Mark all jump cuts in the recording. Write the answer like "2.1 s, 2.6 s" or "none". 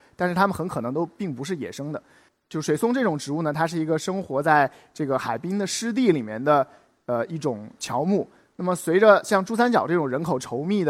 none